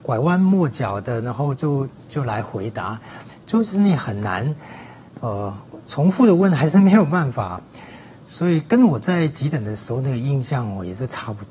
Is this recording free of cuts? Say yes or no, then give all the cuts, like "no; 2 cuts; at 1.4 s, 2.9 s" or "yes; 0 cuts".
yes; 0 cuts